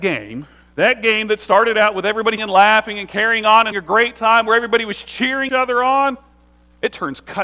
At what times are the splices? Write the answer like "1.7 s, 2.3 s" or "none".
2.4 s, 3.7 s, 5.5 s